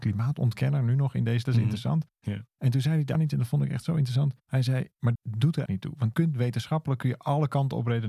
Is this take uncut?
no; 6 cuts; at 1.5 s, 2.5 s, 3.2 s, 5.2 s, 5.7 s, 6.1 s

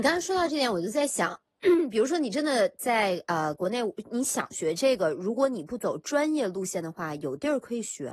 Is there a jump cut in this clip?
no; 0 cuts

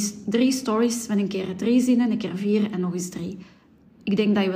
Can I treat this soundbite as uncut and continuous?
yes; 0 cuts

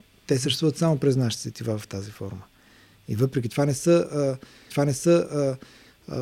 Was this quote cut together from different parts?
yes; 1 cut; at 4.7 s

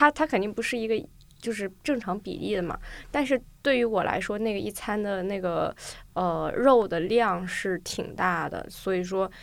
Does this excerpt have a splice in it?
no; 0 cuts

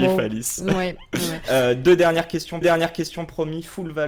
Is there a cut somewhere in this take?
yes; 1 cut; at 2.6 s

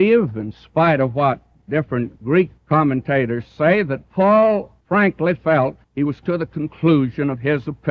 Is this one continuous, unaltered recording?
no; 4 cuts; at 2.6 s, 4.8 s, 5.8 s, 6.2 s

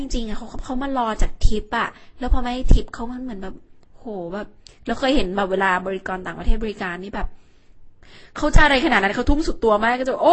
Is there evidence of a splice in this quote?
no; 0 cuts

